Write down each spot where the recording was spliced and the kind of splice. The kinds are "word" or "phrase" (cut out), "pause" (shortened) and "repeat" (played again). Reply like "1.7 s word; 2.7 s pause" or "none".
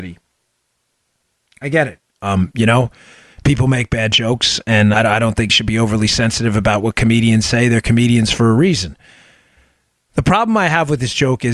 4.9 s word; 5.5 s word

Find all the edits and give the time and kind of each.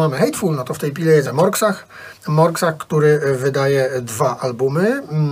1.2 s word; 2.2 s pause

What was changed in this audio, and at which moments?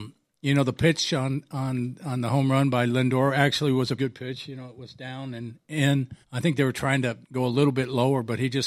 4.0 s word; 6.2 s pause; 7.2 s pause

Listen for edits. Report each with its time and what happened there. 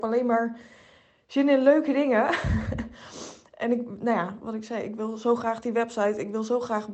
none

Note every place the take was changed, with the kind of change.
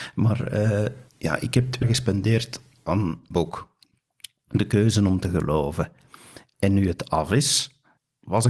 1.1 s pause; 1.8 s word; 3.3 s word

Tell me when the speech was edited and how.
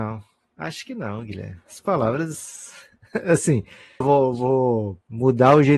4.0 s word

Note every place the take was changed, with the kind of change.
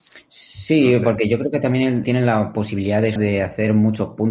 2.0 s word; 3.2 s word

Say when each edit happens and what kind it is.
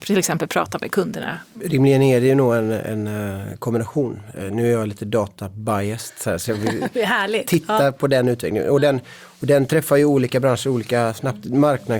none

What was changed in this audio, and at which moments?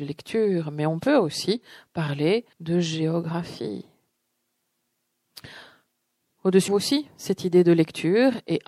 2.5 s pause; 6.7 s phrase

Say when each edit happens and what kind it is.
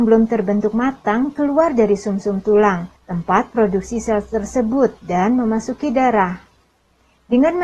3.0 s pause

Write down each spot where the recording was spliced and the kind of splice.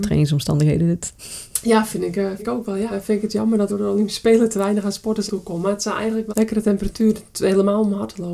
2.4 s word; 2.9 s word; 3.7 s word; 5.3 s word; 6.3 s word

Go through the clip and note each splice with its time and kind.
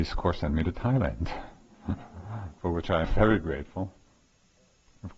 2.6 s word; 3.0 s word

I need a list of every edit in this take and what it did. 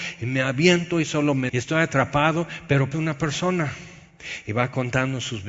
1.5 s word; 2.9 s word

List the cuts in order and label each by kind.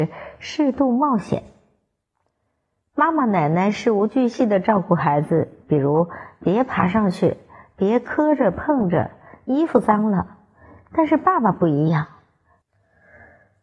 none

